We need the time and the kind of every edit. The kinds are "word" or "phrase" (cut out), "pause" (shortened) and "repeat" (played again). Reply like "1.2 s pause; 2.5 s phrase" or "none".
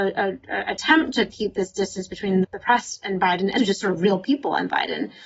2.4 s word; 3.6 s word